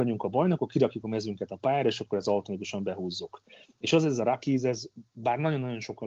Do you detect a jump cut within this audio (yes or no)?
no